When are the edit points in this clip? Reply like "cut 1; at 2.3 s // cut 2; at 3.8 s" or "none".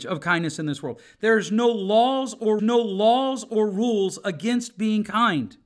cut 1; at 2.6 s